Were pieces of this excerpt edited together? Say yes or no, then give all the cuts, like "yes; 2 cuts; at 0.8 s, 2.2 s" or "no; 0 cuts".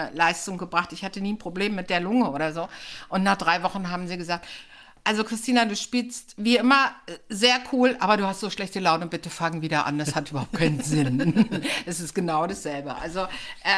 no; 0 cuts